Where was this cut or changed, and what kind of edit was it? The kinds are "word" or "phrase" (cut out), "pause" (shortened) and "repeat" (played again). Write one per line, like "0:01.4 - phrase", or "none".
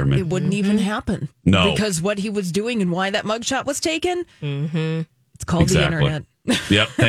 0:01.3 - pause
0:05.2 - pause